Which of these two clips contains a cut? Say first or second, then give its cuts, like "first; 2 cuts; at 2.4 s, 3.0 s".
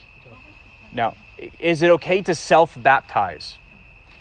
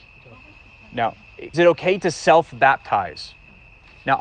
second; 1 cut; at 1.5 s